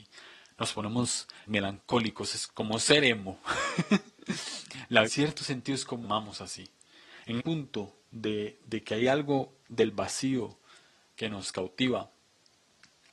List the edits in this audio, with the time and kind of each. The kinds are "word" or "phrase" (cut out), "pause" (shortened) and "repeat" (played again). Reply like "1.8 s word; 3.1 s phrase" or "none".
1.5 s phrase; 2.5 s word; 5.0 s phrase; 6.0 s phrase; 7.4 s word